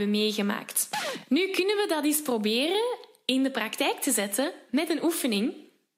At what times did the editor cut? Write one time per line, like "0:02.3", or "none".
none